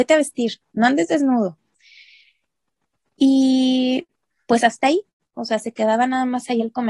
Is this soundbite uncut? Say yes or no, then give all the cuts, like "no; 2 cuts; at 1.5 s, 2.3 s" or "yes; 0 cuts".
yes; 0 cuts